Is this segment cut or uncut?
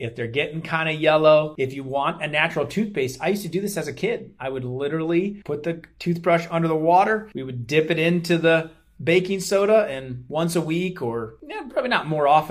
uncut